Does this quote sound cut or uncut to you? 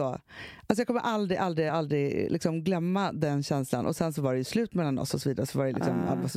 uncut